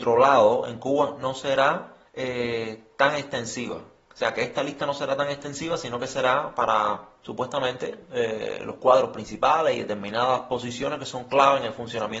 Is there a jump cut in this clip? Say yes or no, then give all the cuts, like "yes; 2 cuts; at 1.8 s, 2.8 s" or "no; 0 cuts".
yes; 1 cut; at 2.1 s